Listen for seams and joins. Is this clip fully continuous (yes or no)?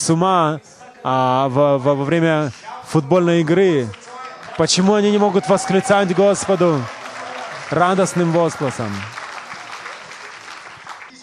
yes